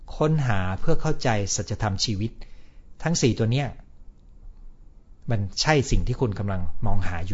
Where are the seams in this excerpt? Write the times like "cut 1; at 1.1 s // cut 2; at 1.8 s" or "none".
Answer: cut 1; at 5.2 s